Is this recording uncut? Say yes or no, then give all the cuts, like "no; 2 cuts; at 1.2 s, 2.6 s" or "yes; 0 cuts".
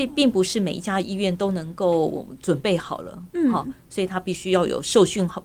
yes; 0 cuts